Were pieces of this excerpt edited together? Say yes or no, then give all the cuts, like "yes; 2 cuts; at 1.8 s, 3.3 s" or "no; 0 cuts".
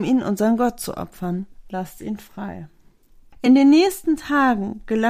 no; 0 cuts